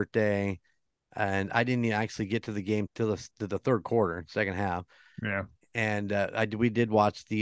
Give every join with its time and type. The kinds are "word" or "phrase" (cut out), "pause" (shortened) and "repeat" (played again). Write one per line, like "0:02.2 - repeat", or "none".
0:02.9 - phrase